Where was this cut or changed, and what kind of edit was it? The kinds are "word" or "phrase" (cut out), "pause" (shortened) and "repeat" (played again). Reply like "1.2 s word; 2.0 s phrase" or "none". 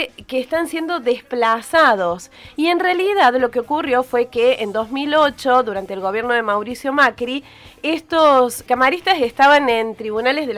8.7 s word